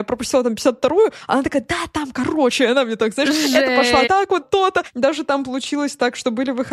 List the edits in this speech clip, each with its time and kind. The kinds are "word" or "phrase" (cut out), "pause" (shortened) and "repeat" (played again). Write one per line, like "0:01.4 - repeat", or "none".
0:04.1 - phrase
0:04.4 - word